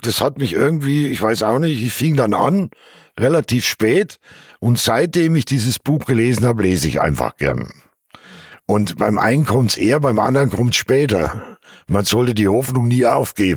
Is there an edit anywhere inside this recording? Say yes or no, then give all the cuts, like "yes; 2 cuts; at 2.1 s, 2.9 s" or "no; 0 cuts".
no; 0 cuts